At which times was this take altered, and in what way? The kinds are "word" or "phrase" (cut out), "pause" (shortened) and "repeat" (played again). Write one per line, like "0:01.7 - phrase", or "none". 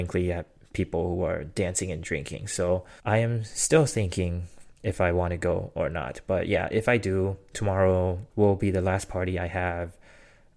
0:03.0 - pause
0:04.8 - pause
0:08.3 - pause